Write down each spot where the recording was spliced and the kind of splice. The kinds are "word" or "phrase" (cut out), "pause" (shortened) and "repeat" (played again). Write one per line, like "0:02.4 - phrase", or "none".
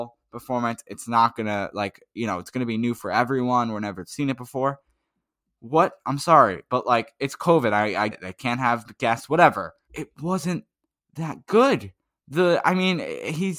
0:08.1 - word
0:09.8 - pause
0:12.0 - pause